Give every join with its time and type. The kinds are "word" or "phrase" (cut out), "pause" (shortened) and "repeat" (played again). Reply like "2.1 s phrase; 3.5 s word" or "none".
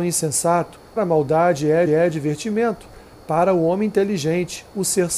1.0 s word; 1.9 s repeat